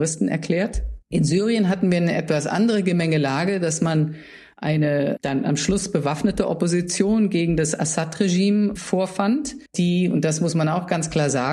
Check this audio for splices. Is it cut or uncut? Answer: cut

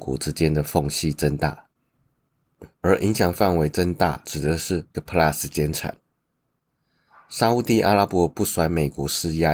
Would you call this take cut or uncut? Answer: cut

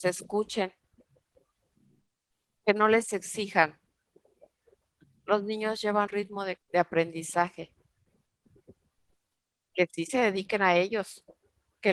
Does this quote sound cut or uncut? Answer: cut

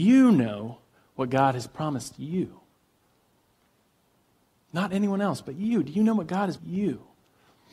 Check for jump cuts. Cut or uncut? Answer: cut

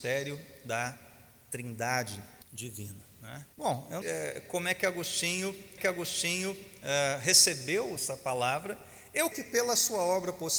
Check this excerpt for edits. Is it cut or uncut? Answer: cut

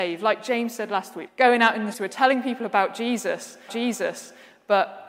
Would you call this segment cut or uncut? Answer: cut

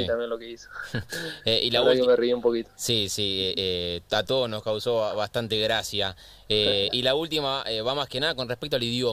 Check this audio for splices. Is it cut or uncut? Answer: uncut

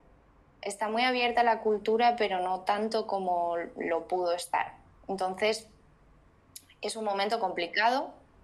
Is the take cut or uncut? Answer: uncut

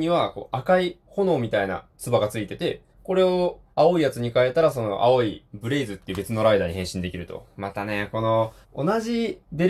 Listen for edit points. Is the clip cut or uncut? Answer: cut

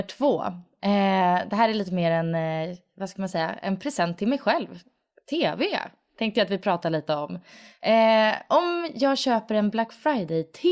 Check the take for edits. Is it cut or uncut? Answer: uncut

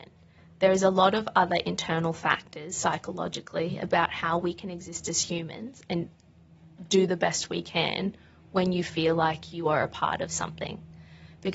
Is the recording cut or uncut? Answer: uncut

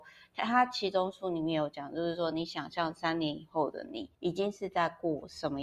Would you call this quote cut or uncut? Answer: cut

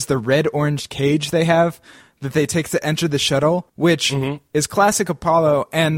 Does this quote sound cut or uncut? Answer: cut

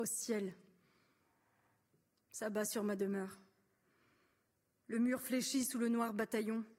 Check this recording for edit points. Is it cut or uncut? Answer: uncut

